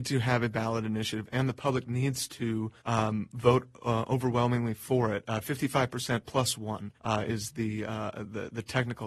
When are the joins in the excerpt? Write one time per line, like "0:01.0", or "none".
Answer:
0:02.8
0:07.0